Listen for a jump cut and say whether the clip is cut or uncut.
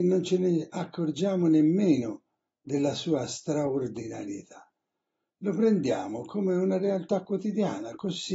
uncut